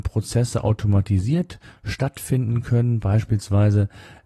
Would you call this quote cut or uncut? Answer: uncut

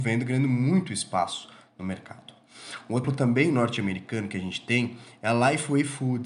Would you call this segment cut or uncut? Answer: cut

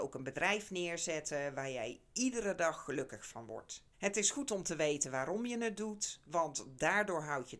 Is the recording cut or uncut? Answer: cut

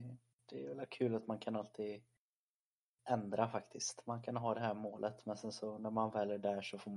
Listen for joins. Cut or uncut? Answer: uncut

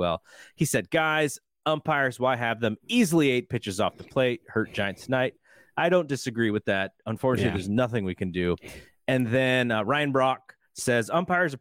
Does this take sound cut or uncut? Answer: uncut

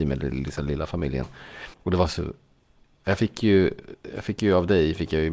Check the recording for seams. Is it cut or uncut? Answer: cut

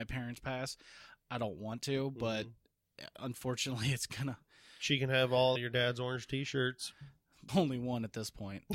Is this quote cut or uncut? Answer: cut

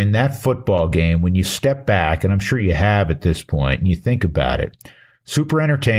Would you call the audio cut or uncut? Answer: uncut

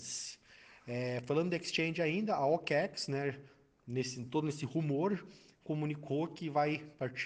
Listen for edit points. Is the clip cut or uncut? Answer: uncut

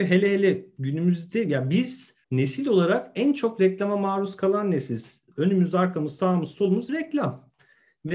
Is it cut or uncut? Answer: cut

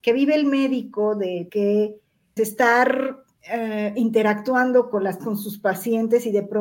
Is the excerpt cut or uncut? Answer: cut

